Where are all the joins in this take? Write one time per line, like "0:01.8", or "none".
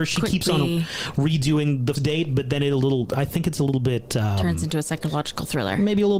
0:01.9